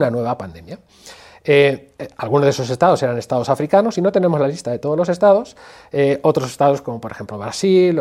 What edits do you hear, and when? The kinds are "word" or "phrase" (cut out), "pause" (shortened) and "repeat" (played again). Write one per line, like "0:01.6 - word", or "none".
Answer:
none